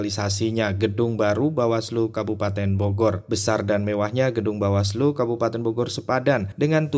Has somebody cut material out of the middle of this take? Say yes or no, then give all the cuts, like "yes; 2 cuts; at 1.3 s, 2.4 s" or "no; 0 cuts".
no; 0 cuts